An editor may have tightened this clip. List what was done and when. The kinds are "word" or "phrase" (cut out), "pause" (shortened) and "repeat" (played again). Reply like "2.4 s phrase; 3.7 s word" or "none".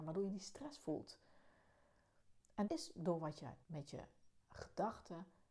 2.7 s word; 3.6 s pause; 4.4 s word